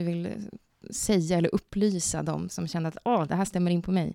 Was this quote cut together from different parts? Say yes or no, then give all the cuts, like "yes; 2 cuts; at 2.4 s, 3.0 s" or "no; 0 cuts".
no; 0 cuts